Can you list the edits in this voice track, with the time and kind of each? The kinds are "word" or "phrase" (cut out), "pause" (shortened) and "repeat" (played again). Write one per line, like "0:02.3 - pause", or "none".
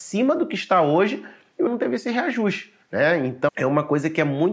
0:01.7 - word
0:02.8 - pause
0:03.5 - word